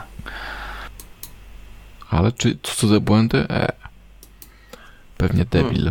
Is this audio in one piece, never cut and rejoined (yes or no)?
yes